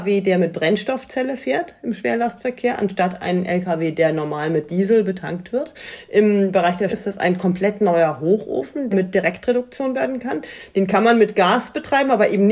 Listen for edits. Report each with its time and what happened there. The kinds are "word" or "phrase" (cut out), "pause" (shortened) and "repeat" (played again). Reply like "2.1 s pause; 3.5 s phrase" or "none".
6.9 s word; 8.9 s word; 9.9 s word

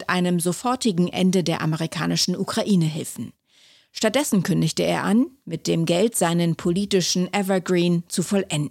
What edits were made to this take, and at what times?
none

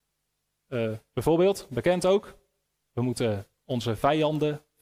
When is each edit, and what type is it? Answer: none

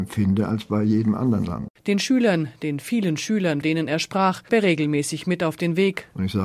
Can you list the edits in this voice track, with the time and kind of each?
1.8 s pause; 3.6 s word; 4.5 s word

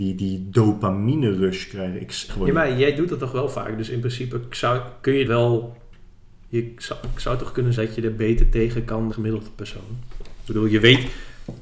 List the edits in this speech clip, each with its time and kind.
2.3 s phrase; 5.2 s word; 7.8 s word; 9.1 s phrase

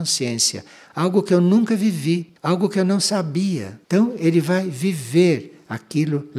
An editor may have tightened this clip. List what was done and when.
2.4 s pause; 3.8 s pause

